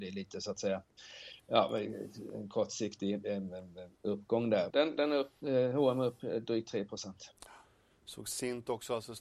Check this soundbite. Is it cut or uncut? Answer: cut